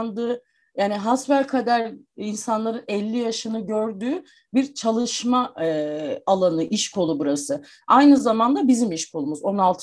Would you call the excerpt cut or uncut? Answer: uncut